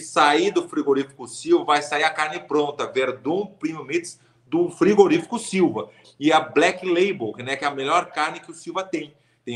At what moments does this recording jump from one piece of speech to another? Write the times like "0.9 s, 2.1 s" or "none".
none